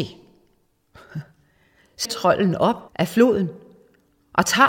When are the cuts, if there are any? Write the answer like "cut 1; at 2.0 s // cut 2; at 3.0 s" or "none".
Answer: cut 1; at 2.0 s // cut 2; at 2.9 s

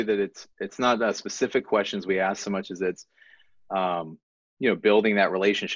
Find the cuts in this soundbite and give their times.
none

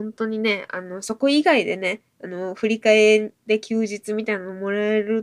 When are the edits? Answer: none

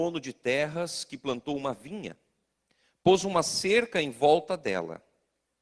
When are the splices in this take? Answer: none

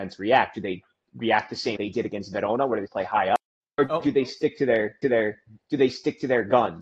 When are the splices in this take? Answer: cut 1; at 1.8 s // cut 2; at 2.9 s // cut 3; at 3.6 s // cut 4; at 5.0 s

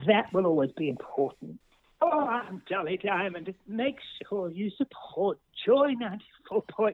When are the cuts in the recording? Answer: none

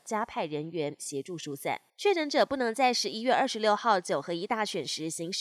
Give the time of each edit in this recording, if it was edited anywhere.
cut 1; at 1.9 s

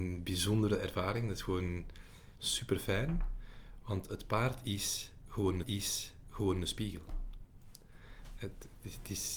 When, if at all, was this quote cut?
cut 1; at 2.4 s // cut 2; at 5.6 s

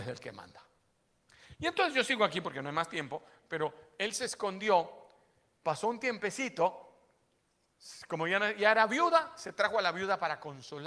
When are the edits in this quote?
none

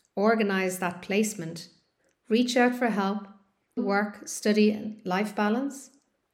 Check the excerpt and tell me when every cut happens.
cut 1; at 3.8 s

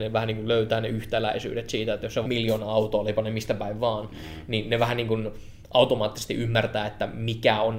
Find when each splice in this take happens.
cut 1; at 2.2 s

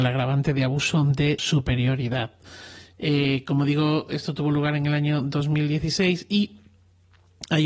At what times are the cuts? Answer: cut 1; at 1.4 s

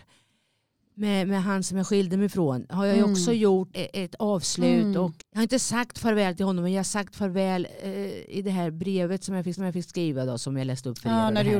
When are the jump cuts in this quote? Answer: cut 1; at 3.7 s // cut 2; at 5.2 s // cut 3; at 9.6 s

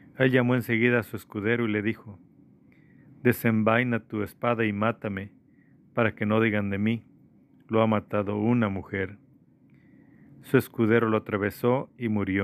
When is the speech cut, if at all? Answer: none

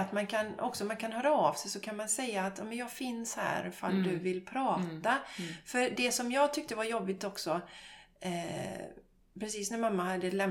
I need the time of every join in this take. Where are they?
none

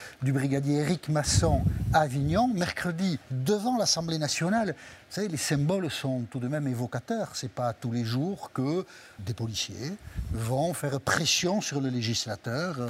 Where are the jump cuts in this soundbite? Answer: cut 1; at 3.2 s // cut 2; at 9.2 s

